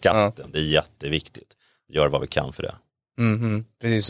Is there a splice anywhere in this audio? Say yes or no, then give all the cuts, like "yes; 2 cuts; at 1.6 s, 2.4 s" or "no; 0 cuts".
no; 0 cuts